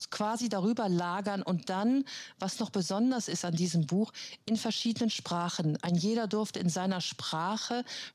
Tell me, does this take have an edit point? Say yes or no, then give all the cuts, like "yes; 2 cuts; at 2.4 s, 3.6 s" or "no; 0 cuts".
no; 0 cuts